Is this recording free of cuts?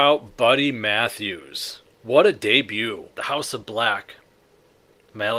yes; 0 cuts

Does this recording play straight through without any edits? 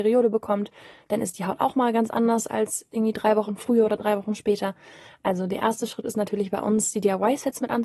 yes; 0 cuts

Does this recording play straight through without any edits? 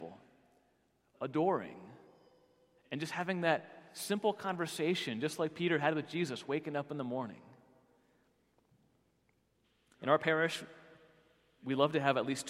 yes; 0 cuts

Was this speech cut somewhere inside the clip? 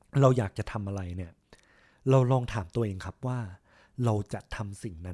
no; 0 cuts

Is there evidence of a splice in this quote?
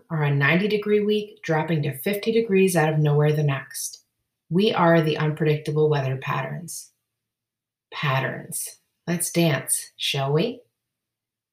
no; 0 cuts

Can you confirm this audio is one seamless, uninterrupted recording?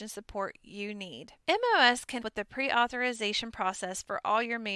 no; 2 cuts; at 1.4 s, 2.2 s

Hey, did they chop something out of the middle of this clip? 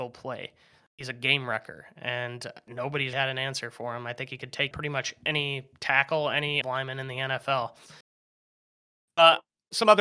yes; 3 cuts; at 3.1 s, 4.7 s, 6.6 s

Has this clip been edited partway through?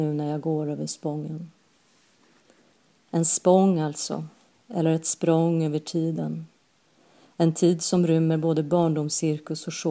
no; 0 cuts

